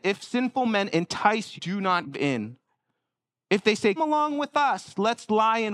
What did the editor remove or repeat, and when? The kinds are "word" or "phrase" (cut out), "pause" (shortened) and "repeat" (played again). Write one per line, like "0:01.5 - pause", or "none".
0:01.6 - word
0:02.1 - word
0:04.0 - word